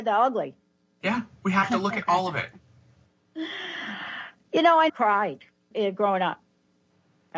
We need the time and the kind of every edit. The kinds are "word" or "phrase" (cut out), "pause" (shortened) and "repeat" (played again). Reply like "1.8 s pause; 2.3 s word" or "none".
4.9 s word; 5.7 s word